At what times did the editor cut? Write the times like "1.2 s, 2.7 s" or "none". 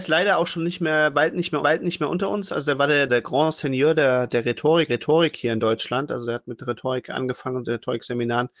1.6 s, 3.1 s, 4.9 s